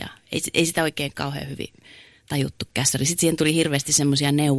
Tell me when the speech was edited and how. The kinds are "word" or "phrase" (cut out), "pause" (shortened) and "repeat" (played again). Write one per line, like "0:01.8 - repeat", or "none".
none